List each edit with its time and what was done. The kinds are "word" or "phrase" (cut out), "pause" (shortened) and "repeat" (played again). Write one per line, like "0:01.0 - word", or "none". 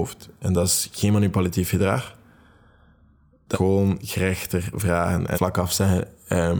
0:03.5 - word
0:05.3 - phrase

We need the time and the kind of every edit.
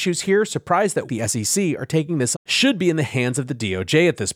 0:01.1 - word
0:02.3 - word

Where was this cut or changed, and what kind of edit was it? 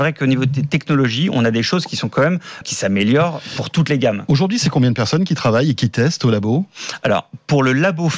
0:02.6 - word

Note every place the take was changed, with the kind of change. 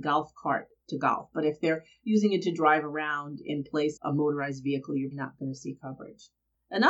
0:04.0 - word
0:05.1 - word

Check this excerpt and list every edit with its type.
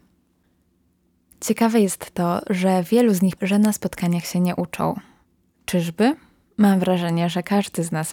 0:03.4 - word

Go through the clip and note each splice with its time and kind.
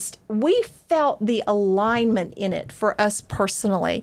none

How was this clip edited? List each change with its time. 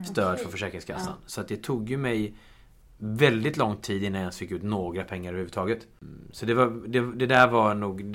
none

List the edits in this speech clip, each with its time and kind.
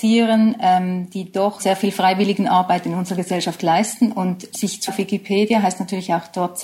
0:01.6 - word
0:04.5 - word
0:04.9 - word

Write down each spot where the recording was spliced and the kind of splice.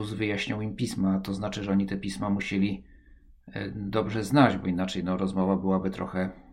none

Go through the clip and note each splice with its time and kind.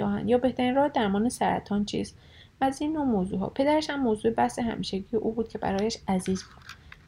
none

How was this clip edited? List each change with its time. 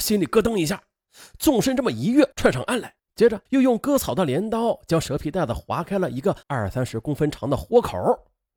0:02.3 - pause
0:03.1 - pause
0:03.5 - pause
0:06.4 - pause

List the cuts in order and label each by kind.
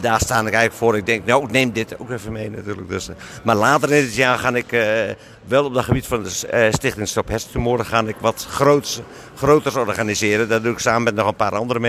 none

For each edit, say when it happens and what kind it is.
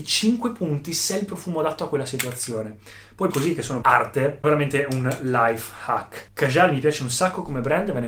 0:03.3 - word
0:03.8 - word
0:04.4 - word

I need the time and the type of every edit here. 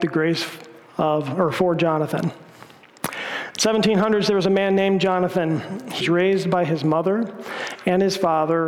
0:06.0 - word

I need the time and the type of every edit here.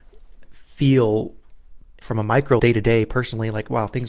0:02.0 - word
0:02.6 - word

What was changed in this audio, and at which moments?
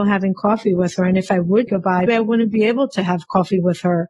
0:01.7 - word
0:02.1 - word

